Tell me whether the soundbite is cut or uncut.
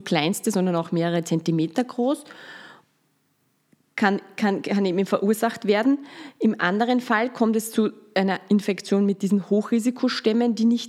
uncut